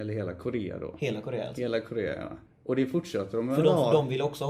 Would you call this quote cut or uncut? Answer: cut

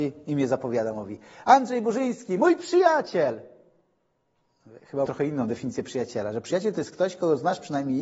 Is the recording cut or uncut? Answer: cut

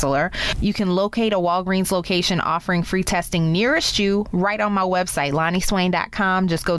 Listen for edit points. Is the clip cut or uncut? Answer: uncut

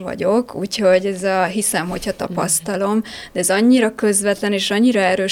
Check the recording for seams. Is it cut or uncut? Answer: uncut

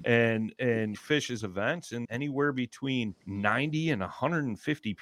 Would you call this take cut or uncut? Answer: cut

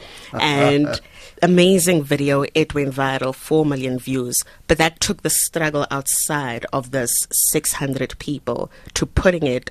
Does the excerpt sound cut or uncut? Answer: cut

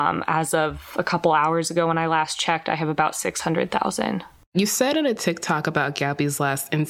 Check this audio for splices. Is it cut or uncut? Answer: uncut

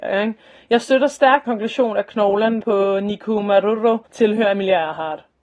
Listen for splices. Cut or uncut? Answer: cut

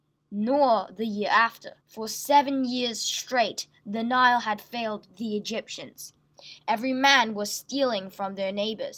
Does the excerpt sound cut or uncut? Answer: cut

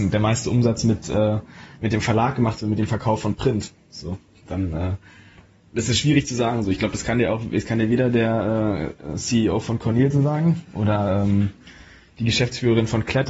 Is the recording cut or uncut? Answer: uncut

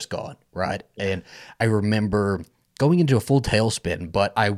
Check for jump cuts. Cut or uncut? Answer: uncut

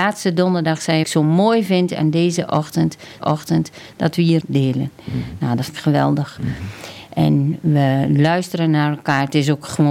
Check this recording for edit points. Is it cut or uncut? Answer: cut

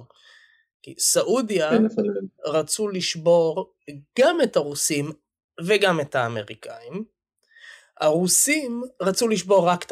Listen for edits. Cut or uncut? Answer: uncut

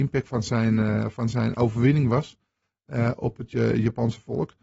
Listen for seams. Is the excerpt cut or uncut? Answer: uncut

